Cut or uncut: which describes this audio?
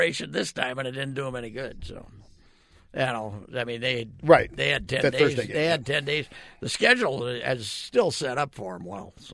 uncut